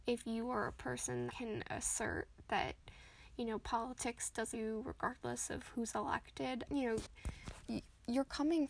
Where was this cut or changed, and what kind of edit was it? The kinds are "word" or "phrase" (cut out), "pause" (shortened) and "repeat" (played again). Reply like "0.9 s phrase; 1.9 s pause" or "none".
1.3 s word; 4.5 s word; 6.7 s word